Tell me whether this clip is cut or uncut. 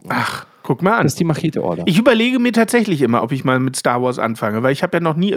uncut